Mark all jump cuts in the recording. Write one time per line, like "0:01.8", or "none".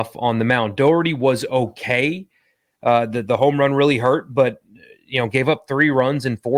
none